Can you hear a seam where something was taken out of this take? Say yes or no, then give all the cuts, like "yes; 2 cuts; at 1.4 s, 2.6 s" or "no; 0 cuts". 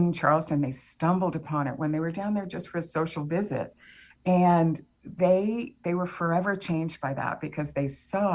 no; 0 cuts